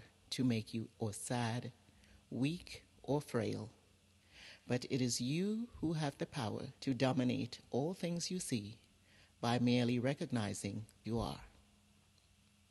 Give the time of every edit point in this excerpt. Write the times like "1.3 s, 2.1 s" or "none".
0.9 s, 6.8 s, 11.0 s